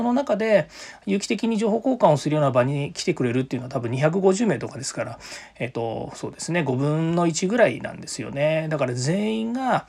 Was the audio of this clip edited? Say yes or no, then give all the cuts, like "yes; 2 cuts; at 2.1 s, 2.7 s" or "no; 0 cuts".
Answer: no; 0 cuts